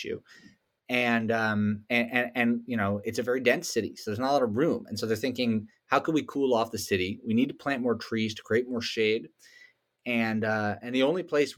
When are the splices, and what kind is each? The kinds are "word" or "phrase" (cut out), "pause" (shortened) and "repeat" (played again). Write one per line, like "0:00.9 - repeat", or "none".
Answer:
none